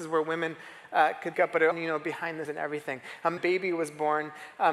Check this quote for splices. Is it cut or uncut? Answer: cut